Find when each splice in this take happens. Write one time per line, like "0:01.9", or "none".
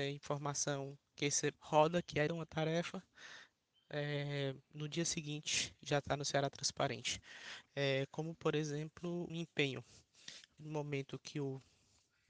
0:01.5
0:02.3
0:09.3
0:10.6

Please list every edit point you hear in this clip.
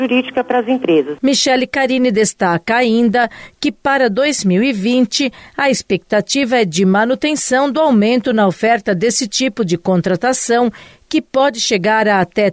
none

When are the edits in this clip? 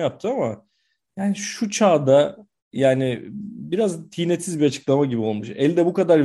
0:02.6

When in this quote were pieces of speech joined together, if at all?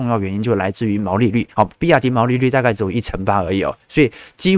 0:01.5

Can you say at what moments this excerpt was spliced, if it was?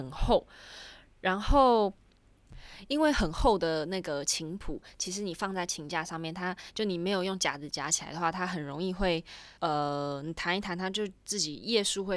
0:09.6

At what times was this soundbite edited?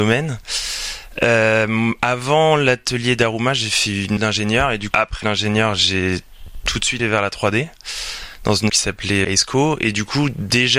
0:04.2
0:04.9
0:05.2
0:07.0
0:08.7
0:09.2

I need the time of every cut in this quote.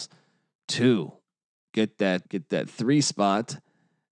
0:02.3

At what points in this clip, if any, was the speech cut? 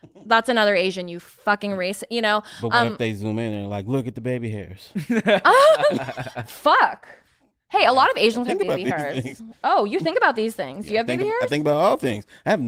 none

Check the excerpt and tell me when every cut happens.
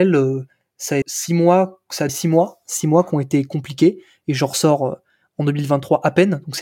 0:01.0
0:02.1

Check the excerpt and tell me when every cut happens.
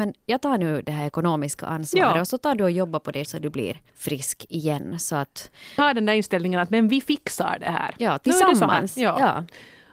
0:03.2
0:03.9
0:05.8

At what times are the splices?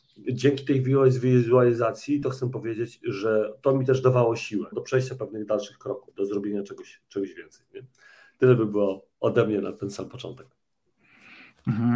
0:04.7

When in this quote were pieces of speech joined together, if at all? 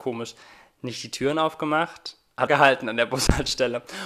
0:02.5

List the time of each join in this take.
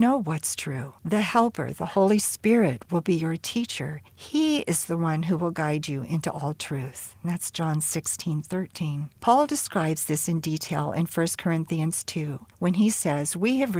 0:01.0
0:04.1
0:09.2
0:12.5

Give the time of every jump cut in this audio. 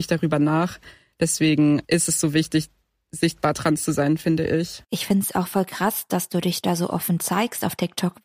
none

